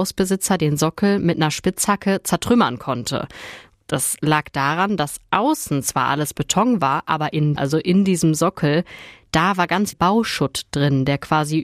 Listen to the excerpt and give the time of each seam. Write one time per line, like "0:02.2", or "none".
0:07.6
0:09.9